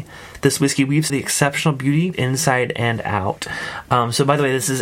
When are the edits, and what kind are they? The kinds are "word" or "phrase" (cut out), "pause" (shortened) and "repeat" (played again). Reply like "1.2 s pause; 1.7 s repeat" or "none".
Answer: 1.1 s word; 2.1 s word

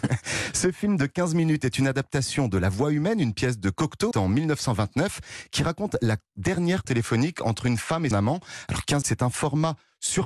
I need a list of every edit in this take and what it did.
4.1 s word; 6.8 s word; 8.1 s word; 9.0 s word

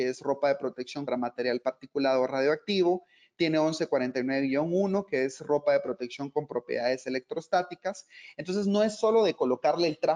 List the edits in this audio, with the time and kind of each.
1.1 s word

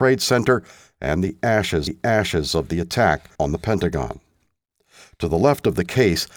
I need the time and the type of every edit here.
1.9 s repeat; 3.3 s pause

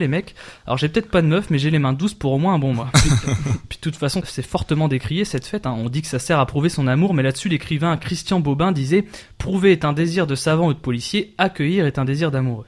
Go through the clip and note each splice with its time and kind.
none

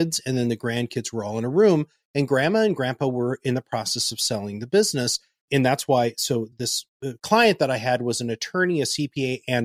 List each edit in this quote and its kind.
none

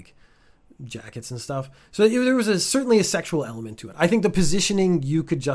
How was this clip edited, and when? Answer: none

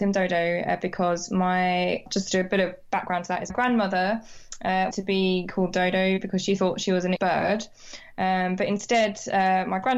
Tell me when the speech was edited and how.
2.1 s word; 3.5 s word; 4.9 s word; 7.2 s word

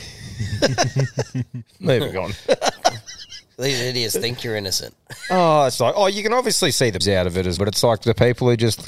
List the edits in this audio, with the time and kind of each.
5.8 s word; 7.0 s word; 7.6 s word

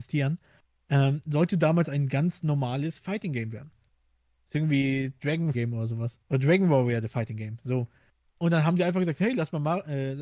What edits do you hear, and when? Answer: 5.5 s phrase; 6.2 s pause

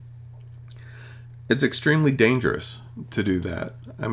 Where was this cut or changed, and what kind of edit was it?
none

